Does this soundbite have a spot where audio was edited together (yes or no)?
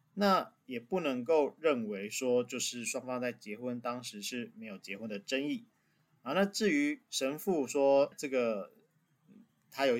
yes